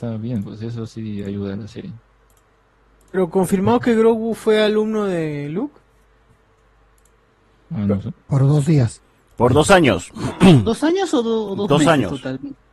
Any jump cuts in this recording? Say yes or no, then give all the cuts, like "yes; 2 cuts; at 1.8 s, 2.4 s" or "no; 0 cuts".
no; 0 cuts